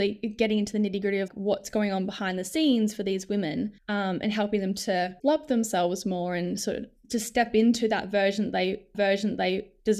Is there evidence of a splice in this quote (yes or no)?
yes